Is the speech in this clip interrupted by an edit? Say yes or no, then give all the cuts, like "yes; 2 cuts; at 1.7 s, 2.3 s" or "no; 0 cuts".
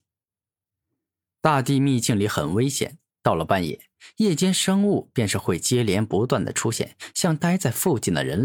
no; 0 cuts